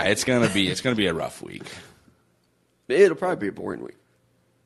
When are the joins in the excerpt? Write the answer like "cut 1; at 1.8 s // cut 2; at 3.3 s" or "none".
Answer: none